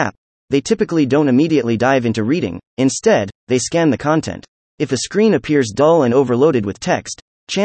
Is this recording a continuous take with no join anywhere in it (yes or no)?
no